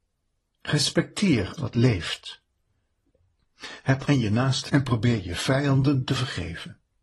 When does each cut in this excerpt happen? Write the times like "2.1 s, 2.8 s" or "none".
1.6 s, 4.0 s, 4.7 s